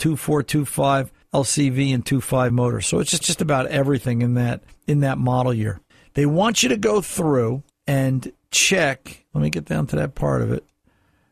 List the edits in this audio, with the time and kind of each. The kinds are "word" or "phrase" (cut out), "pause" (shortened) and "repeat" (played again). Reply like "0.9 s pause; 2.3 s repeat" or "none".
1.2 s pause; 2.5 s word; 3.2 s repeat; 4.7 s pause; 5.9 s pause; 7.7 s pause